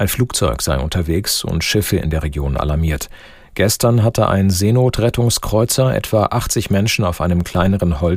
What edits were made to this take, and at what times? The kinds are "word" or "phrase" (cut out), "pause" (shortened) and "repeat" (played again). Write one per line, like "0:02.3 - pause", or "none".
none